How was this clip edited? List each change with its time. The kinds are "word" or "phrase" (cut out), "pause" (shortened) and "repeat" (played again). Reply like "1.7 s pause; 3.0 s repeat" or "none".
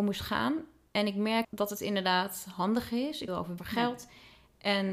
1.4 s word; 3.3 s phrase; 3.6 s phrase